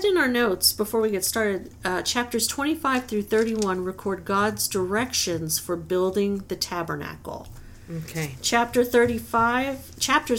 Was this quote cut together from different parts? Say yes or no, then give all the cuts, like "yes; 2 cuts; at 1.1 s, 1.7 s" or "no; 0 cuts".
no; 0 cuts